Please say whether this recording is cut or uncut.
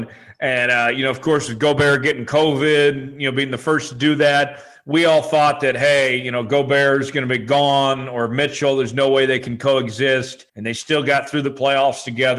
cut